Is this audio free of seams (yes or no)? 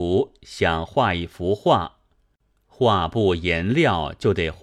yes